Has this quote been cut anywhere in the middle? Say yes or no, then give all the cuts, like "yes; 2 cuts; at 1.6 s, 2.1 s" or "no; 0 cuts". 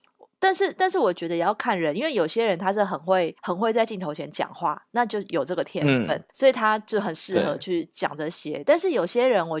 yes; 2 cuts; at 3.4 s, 6.3 s